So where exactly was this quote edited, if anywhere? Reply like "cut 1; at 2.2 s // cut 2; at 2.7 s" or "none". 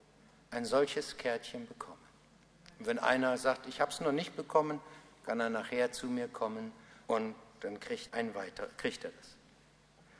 cut 1; at 7.0 s // cut 2; at 8.1 s